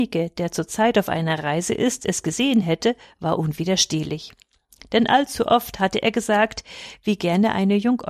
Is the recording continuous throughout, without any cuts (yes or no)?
yes